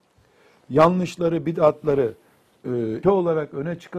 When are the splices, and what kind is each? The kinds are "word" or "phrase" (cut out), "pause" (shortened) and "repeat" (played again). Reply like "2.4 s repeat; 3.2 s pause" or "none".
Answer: 3.0 s word